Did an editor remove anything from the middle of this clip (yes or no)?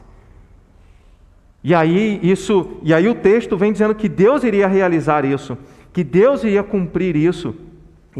no